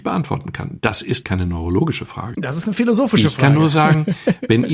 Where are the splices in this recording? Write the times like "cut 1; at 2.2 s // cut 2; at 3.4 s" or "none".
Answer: cut 1; at 1.2 s